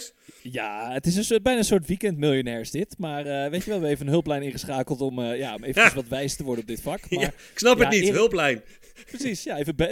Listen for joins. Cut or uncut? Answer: uncut